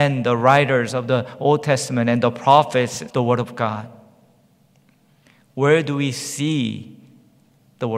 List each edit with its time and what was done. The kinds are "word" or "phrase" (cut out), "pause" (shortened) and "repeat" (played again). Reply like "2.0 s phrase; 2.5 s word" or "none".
3.1 s word